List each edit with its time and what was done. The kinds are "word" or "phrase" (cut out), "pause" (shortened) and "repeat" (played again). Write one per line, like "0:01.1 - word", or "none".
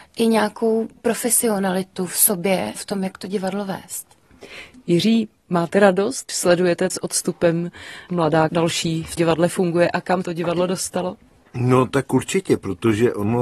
0:01.0 - word
0:02.7 - word
0:06.3 - word
0:06.9 - word
0:08.1 - word
0:08.5 - word
0:09.2 - word
0:10.2 - word